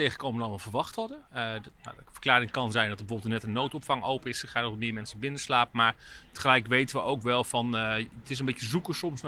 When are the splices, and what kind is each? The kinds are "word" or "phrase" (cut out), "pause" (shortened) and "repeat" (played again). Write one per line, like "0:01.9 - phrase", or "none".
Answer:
0:01.3 - pause